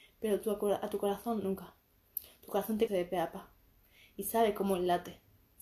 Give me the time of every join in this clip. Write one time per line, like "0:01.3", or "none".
0:02.9